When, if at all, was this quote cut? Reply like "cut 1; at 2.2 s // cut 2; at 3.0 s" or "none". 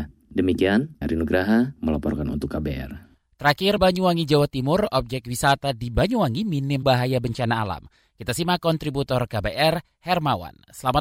cut 1; at 1.0 s // cut 2; at 3.8 s // cut 3; at 6.8 s